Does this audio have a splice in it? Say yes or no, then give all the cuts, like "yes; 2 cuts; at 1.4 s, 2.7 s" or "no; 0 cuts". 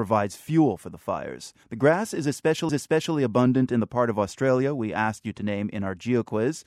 yes; 2 cuts; at 1.6 s, 2.7 s